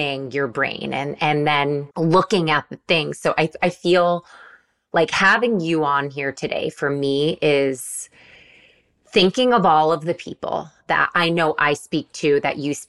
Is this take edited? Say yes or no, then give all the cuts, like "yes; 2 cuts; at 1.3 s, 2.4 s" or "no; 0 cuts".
yes; 1 cut; at 1.9 s